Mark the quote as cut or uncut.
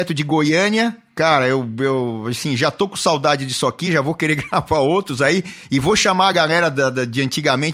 uncut